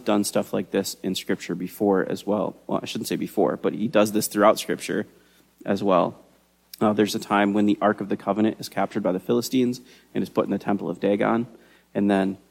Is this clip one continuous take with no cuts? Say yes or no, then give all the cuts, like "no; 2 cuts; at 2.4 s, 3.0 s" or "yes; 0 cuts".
yes; 0 cuts